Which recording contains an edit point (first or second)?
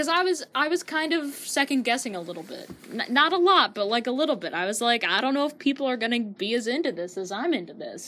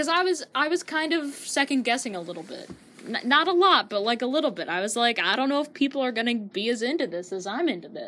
first